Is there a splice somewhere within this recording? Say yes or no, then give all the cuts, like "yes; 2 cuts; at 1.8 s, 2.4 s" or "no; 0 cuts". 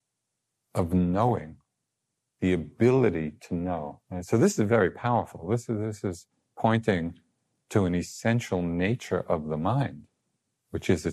yes; 1 cut; at 4.0 s